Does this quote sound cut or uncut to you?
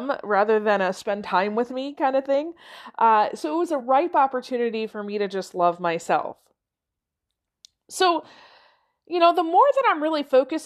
uncut